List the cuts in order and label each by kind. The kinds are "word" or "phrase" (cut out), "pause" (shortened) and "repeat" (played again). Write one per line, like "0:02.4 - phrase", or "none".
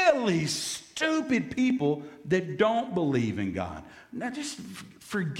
none